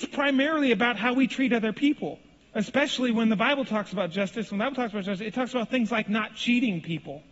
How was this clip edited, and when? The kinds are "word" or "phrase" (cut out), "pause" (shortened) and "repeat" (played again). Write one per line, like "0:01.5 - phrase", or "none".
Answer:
0:02.4 - pause